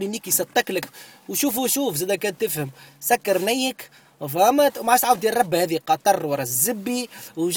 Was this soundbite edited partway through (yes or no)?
no